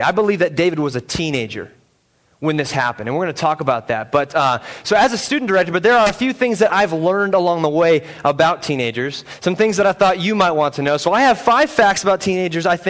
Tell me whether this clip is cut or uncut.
uncut